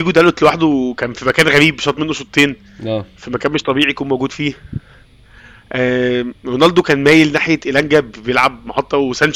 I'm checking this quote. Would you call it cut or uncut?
uncut